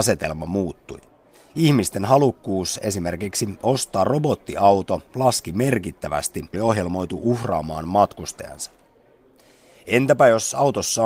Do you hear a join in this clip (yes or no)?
yes